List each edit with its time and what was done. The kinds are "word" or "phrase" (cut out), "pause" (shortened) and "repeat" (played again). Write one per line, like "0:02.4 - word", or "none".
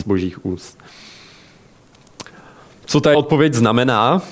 0:03.1 - word

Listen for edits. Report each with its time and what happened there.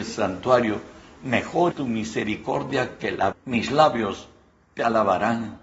0:01.7 - word
0:03.3 - word

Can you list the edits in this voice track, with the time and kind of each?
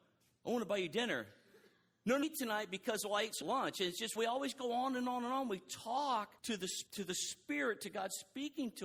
0:02.2 - phrase
0:03.4 - phrase
0:04.2 - word
0:06.4 - pause
0:06.9 - pause

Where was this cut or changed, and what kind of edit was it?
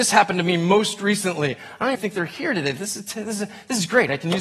0:01.9 - word

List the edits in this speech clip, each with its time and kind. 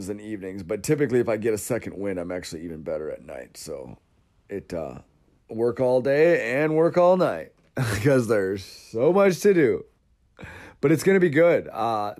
none

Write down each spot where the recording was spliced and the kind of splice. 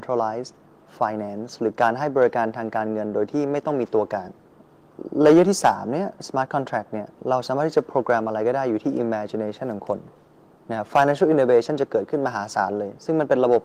none

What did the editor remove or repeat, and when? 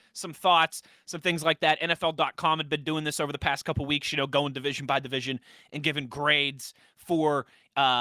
none

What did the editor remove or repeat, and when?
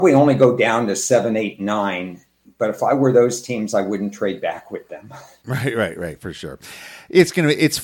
0:02.5 - pause

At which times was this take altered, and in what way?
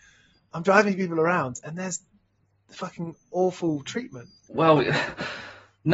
0:04.4 - pause

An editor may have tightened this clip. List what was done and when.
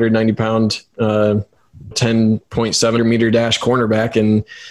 0:01.9 - phrase
0:03.0 - word

